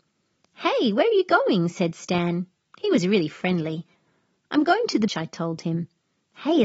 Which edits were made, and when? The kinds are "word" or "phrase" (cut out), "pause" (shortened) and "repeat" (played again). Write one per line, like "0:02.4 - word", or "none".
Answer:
0:05.1 - word